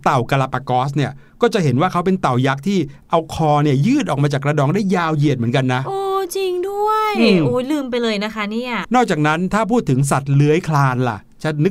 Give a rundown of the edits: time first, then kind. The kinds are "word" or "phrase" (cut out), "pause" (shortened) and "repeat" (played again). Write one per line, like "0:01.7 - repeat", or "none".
0:08.8 - phrase